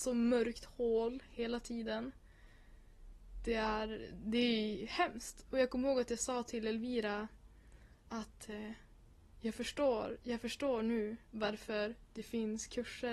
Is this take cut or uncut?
uncut